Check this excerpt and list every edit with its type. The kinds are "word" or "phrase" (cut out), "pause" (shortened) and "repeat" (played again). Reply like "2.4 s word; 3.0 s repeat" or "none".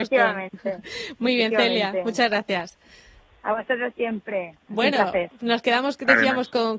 none